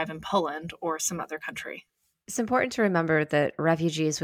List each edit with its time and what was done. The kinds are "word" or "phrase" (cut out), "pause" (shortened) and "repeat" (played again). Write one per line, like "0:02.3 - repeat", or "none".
none